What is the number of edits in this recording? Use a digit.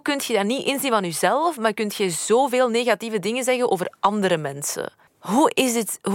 0